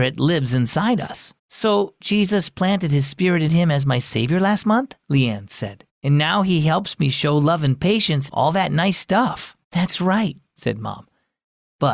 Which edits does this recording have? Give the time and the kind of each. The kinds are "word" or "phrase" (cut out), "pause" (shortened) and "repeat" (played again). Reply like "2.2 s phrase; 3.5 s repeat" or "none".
1.4 s pause; 3.5 s phrase; 5.9 s pause; 8.3 s word; 9.6 s pause

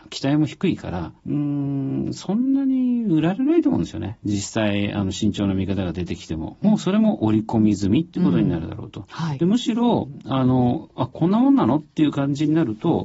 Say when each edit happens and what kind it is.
1.2 s pause

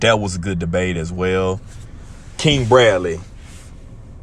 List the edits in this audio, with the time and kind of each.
none

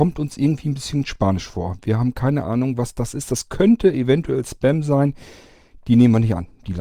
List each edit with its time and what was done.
none

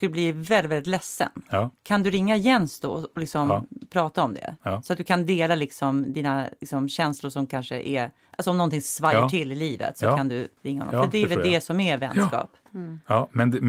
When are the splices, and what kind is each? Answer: 10.6 s pause

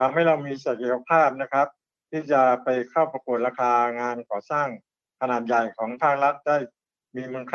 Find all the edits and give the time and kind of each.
none

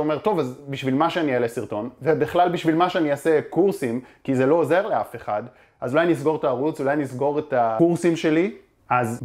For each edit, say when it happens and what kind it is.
none

